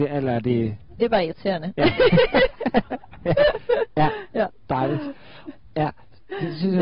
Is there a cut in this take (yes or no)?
yes